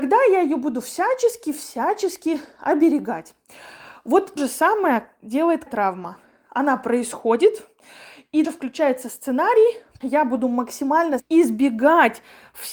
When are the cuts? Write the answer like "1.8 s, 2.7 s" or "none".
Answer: 4.4 s, 5.7 s, 8.4 s, 10.0 s, 11.2 s